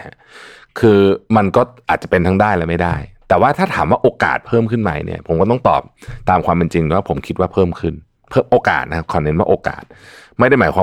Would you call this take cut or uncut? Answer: uncut